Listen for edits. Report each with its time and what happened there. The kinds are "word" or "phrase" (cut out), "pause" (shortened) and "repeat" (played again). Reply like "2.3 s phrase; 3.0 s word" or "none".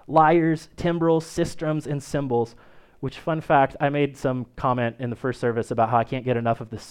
none

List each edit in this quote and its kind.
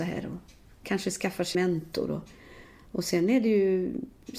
1.5 s word

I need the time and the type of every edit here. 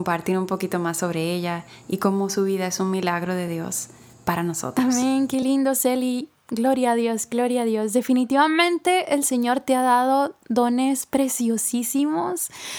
none

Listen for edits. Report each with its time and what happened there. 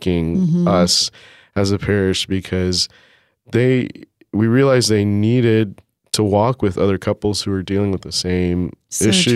none

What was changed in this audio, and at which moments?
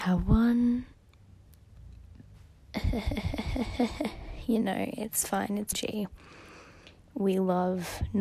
2.3 s word; 5.7 s word

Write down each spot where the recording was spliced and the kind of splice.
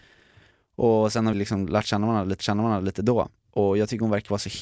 1.3 s word; 2.4 s repeat

